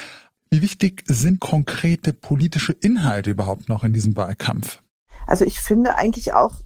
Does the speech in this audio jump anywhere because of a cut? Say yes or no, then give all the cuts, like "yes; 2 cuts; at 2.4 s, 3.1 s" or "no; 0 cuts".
yes; 1 cut; at 1.4 s